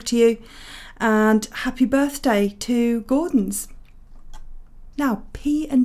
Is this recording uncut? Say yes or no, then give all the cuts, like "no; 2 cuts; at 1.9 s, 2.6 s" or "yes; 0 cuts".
yes; 0 cuts